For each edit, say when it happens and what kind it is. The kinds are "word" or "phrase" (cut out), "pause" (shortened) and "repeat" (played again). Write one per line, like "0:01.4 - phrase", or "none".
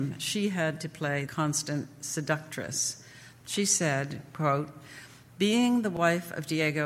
0:01.3 - word